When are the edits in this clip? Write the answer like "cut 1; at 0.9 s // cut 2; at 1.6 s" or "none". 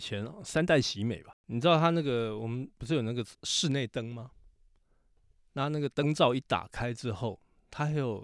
cut 1; at 1.4 s // cut 2; at 2.7 s // cut 3; at 3.3 s

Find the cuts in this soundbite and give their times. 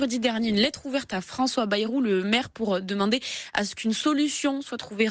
none

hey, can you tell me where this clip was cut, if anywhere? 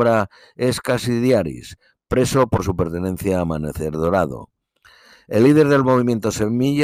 none

